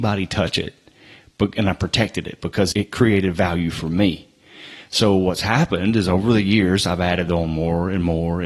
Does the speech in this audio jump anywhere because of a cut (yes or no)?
yes